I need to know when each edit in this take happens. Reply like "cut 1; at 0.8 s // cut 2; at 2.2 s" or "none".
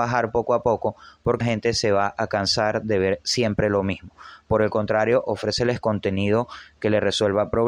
cut 1; at 1.4 s // cut 2; at 3.2 s